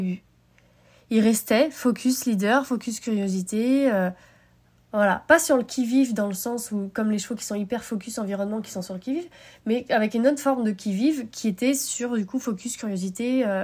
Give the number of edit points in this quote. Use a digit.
0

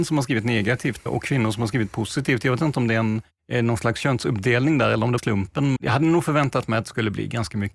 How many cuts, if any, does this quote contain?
3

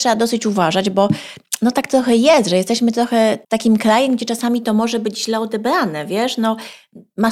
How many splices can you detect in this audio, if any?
1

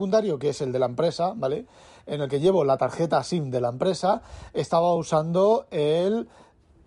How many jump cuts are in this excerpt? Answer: 0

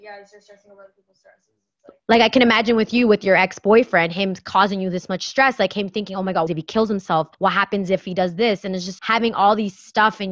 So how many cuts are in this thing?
3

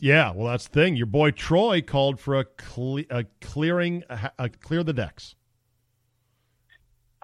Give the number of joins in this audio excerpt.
1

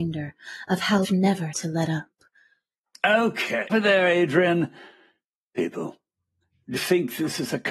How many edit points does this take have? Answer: 4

